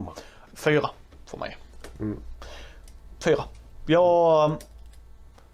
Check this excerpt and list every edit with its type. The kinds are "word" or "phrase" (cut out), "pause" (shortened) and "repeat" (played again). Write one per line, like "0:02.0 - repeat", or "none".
none

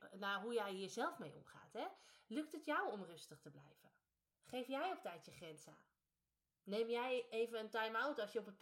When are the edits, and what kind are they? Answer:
none

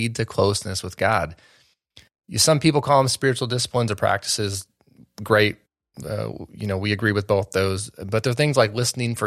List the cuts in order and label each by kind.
none

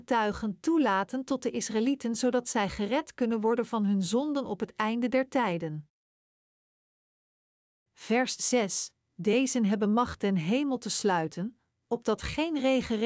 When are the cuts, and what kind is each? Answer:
none

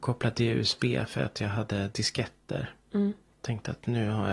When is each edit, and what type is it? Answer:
none

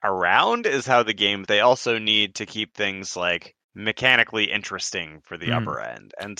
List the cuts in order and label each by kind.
0:01.4 - phrase
0:03.6 - pause

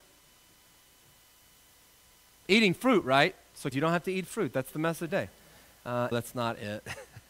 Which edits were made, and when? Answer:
0:03.7 - word
0:05.1 - phrase
0:06.1 - word

